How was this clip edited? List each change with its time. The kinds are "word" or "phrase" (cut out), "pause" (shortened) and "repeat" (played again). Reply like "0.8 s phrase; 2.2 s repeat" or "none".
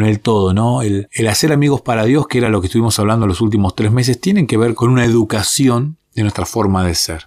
none